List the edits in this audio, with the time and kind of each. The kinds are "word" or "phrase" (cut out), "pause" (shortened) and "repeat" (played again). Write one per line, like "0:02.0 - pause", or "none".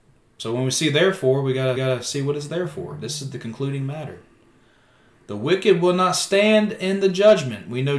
0:01.8 - repeat